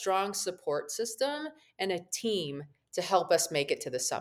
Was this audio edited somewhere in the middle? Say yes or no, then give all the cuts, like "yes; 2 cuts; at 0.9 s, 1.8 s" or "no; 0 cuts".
no; 0 cuts